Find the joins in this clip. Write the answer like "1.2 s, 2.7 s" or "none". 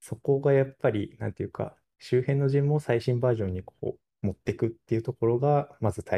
none